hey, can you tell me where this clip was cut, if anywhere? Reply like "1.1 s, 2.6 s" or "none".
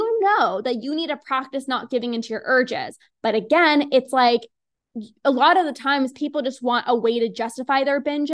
none